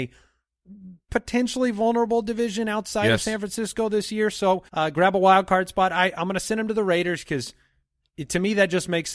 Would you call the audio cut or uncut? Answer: cut